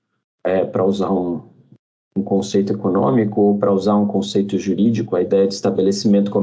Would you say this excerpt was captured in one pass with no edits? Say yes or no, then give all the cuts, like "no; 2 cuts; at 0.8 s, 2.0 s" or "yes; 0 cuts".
yes; 0 cuts